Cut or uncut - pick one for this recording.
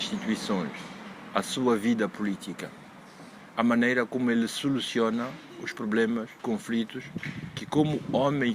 cut